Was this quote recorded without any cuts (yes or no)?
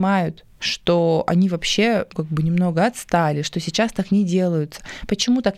no